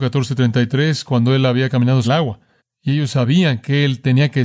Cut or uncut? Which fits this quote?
cut